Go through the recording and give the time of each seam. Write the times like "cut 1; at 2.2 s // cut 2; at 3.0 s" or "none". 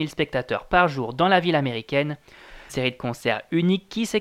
cut 1; at 2.7 s